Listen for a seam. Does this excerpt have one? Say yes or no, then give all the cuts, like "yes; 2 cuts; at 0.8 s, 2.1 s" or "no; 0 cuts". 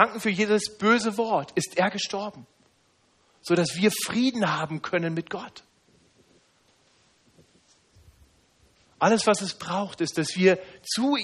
no; 0 cuts